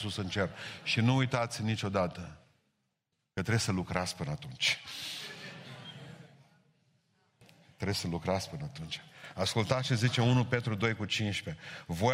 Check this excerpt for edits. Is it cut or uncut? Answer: uncut